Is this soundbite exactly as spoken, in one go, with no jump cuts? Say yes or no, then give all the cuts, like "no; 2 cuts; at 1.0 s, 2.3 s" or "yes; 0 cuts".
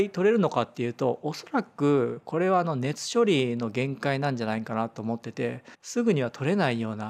no; 1 cut; at 5.7 s